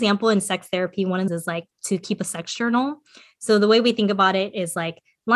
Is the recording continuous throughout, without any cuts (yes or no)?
no